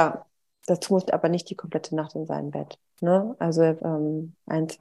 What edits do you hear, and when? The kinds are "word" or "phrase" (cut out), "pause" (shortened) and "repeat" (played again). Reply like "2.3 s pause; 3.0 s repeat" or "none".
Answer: 1.0 s phrase; 3.8 s word